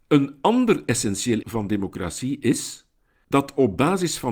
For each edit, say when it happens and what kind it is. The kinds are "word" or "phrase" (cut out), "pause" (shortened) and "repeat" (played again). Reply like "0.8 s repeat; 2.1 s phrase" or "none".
1.4 s word